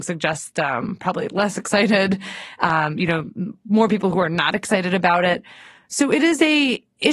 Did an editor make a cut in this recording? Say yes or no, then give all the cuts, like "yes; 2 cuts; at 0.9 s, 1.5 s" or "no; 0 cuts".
no; 0 cuts